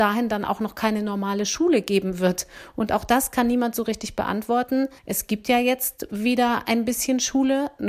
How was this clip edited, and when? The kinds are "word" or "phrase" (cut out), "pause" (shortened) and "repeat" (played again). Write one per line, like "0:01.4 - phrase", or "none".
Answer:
0:05.0 - pause